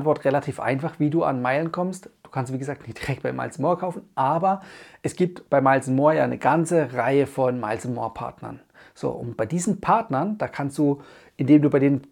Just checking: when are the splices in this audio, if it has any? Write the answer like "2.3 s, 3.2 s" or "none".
none